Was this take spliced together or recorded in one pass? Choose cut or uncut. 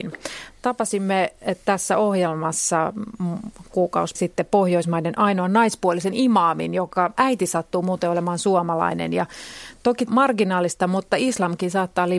cut